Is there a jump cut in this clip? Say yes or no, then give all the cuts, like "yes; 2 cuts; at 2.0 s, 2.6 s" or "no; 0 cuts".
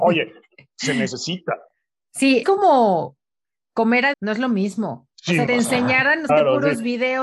yes; 5 cuts; at 2.4 s, 4.1 s, 5.1 s, 5.5 s, 6.3 s